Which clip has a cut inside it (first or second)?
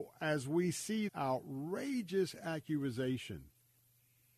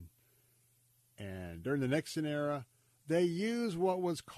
first